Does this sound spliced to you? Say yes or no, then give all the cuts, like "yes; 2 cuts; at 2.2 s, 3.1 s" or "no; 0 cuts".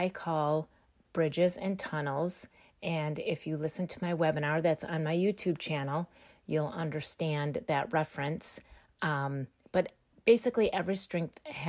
no; 0 cuts